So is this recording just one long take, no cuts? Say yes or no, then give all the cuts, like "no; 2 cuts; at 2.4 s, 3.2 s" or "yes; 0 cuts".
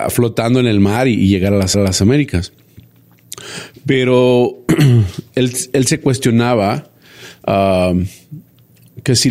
no; 1 cut; at 1.7 s